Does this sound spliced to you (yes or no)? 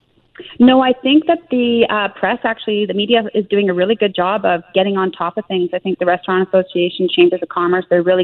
no